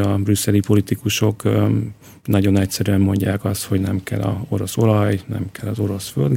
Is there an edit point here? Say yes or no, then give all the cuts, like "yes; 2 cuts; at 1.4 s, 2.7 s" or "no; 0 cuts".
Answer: no; 0 cuts